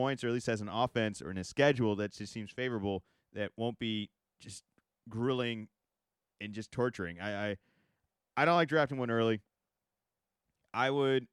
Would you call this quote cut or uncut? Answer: uncut